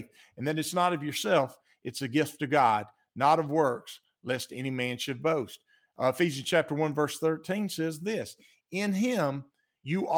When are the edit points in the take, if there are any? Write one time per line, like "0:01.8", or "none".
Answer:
none